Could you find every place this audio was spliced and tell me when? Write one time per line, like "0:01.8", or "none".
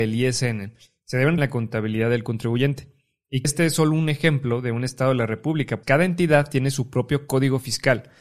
0:01.4
0:03.4
0:05.8